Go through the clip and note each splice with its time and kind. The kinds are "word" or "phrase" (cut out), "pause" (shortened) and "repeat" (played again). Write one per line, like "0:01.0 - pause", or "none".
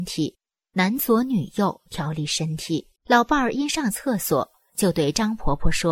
0:03.0 - pause